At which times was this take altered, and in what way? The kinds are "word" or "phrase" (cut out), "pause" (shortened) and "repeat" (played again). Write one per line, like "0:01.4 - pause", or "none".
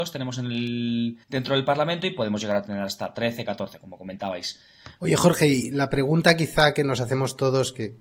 0:01.2 - pause